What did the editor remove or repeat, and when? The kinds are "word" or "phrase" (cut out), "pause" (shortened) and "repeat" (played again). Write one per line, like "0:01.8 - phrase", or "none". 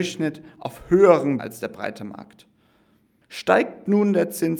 0:01.4 - word